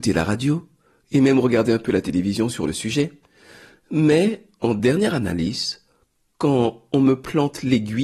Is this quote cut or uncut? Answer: uncut